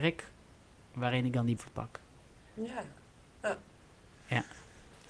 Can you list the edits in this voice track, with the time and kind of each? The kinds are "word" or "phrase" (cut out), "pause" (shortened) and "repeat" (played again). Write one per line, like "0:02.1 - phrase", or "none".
0:01.6 - word